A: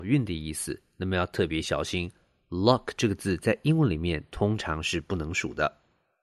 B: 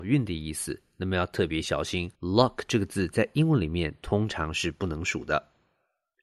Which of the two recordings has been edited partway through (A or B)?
B